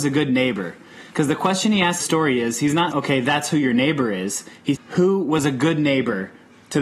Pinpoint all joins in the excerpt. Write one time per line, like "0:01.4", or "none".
0:01.1
0:02.0
0:02.9
0:04.7